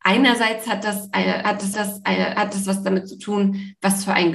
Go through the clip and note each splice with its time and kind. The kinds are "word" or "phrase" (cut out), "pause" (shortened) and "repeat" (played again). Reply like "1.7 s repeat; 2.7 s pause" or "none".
1.7 s repeat